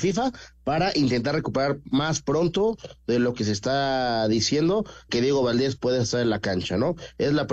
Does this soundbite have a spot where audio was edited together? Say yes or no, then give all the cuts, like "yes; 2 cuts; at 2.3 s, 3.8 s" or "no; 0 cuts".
yes; 1 cut; at 5.1 s